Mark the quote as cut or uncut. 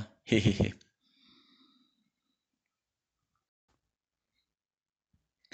uncut